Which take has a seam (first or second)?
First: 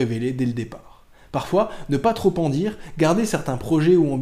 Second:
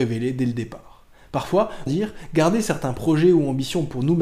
second